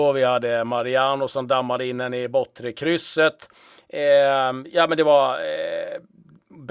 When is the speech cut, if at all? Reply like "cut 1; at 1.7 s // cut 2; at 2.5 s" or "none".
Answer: none